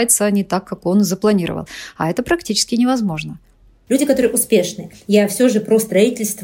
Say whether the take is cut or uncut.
uncut